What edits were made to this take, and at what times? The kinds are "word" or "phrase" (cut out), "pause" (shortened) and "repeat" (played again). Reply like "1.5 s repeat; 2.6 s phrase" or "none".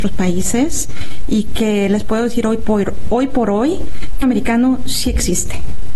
4.2 s phrase